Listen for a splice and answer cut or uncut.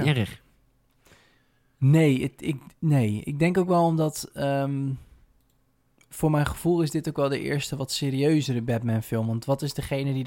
uncut